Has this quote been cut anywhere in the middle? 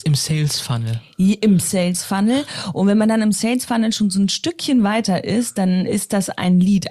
no; 0 cuts

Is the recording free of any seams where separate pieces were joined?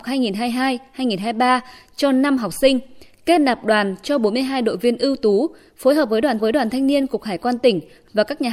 no; 1 cut; at 6.4 s

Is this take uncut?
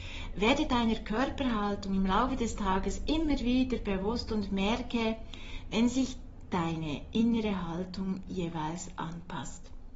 yes; 0 cuts

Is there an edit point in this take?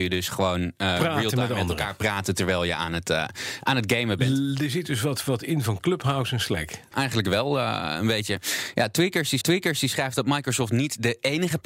yes; 2 cuts; at 6.9 s, 9.4 s

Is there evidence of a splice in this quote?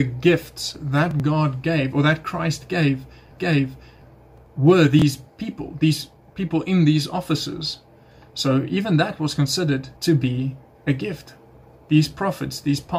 yes; 2 cuts; at 3.4 s, 10.0 s

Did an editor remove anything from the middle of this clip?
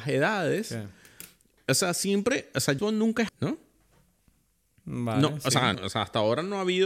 yes; 3 cuts; at 2.8 s, 3.3 s, 5.7 s

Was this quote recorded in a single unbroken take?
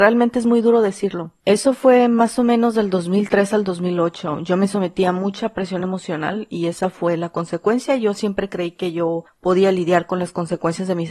yes; 0 cuts

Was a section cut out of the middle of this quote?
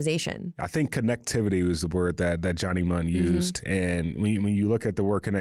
no; 0 cuts

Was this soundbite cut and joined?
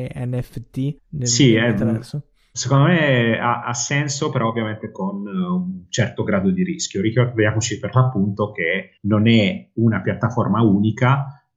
yes; 2 cuts; at 1.0 s, 9.0 s

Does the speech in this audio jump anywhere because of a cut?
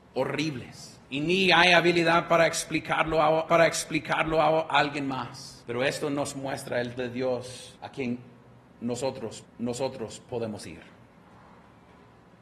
yes; 6 cuts; at 1.0 s, 3.5 s, 5.6 s, 7.0 s, 7.8 s, 9.4 s

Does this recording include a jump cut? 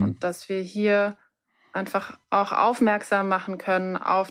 no; 0 cuts

